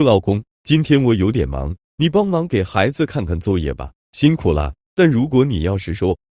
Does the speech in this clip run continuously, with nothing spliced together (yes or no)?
no